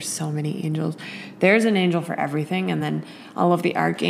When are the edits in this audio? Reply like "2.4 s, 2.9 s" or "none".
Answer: none